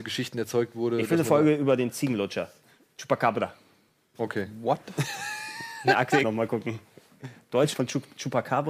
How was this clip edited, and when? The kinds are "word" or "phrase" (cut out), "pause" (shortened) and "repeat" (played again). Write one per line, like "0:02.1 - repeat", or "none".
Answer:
0:06.2 - word
0:07.7 - word